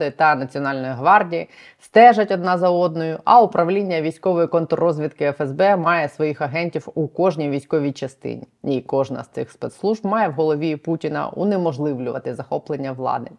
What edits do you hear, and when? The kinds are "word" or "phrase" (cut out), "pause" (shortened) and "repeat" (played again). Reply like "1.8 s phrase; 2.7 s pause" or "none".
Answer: none